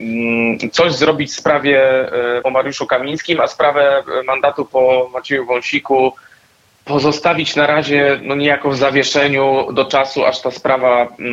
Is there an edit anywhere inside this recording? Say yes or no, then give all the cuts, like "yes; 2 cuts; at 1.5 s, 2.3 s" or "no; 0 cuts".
yes; 1 cut; at 2.4 s